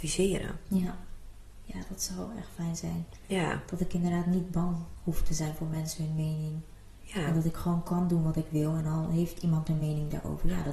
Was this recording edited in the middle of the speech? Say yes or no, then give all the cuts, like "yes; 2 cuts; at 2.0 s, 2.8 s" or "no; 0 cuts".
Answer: no; 0 cuts